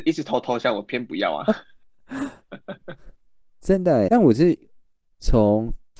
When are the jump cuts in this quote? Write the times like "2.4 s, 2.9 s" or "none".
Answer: 4.1 s